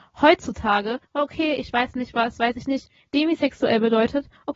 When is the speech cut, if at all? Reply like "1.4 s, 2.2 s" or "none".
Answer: 1.0 s